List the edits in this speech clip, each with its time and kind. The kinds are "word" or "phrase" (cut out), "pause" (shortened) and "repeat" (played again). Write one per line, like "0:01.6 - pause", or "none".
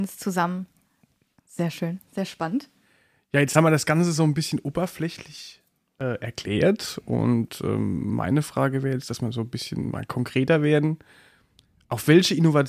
none